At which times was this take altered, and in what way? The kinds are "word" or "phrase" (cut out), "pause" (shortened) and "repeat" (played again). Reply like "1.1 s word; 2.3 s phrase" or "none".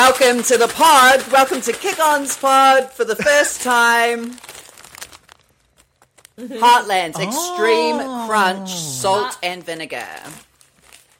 none